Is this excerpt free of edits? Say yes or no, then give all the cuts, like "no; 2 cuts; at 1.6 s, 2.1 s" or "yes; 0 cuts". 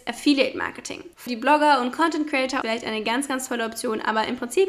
no; 2 cuts; at 1.3 s, 2.6 s